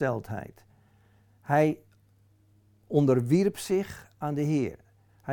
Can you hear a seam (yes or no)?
no